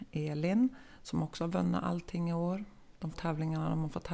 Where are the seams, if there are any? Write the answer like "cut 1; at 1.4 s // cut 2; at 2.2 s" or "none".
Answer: cut 1; at 3.1 s